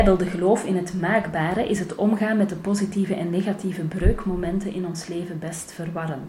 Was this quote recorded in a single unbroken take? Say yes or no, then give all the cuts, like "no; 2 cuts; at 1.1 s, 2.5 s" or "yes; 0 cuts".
yes; 0 cuts